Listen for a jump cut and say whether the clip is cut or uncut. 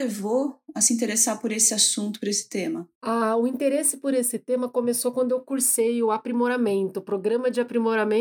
uncut